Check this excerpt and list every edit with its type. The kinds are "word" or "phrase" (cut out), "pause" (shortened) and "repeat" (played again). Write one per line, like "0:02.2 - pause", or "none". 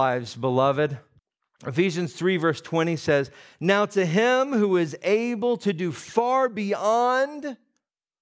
0:01.2 - pause